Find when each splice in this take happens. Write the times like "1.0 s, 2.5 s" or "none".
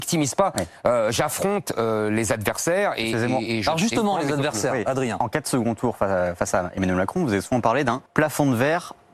8.1 s

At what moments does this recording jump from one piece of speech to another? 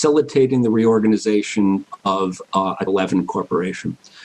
2.0 s, 2.9 s

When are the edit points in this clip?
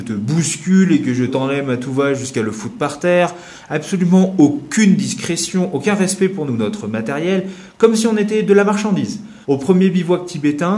1.3 s, 6.5 s, 9.4 s

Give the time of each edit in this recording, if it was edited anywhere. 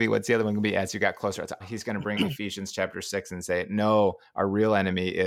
1.6 s, 2.1 s

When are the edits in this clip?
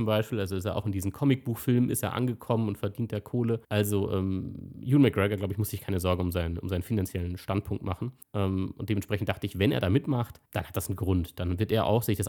3.6 s, 8.2 s, 10.4 s

